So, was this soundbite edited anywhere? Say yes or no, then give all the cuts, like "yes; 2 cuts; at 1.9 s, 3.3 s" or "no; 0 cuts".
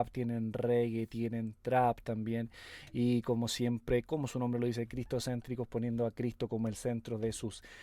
no; 0 cuts